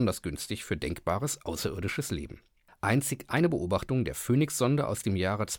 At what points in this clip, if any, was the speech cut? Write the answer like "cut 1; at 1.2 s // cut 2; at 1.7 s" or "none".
cut 1; at 2.7 s